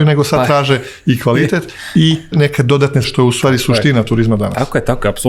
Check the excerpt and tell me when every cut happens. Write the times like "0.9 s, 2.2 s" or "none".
2.3 s, 3.0 s